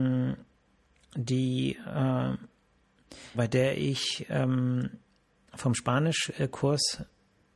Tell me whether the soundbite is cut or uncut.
cut